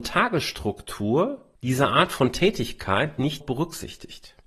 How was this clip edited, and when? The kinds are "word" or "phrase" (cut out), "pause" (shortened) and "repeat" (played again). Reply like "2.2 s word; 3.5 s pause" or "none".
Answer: 1.5 s pause; 3.4 s word